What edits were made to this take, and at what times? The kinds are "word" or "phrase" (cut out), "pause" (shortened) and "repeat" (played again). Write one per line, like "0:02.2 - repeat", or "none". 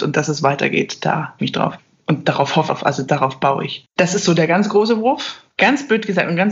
0:01.4 - phrase
0:02.7 - word
0:03.9 - pause
0:05.5 - pause